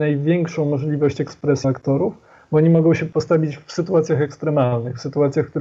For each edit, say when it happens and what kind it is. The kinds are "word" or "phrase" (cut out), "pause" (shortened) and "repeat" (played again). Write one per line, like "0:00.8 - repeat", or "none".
0:01.6 - word